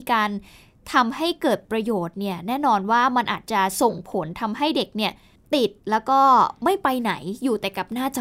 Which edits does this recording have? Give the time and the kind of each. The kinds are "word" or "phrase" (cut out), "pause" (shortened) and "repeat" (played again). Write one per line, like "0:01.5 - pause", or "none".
none